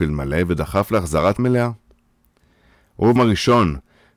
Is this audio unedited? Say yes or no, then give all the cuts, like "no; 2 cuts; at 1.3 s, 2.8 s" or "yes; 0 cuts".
no; 2 cuts; at 1.4 s, 3.2 s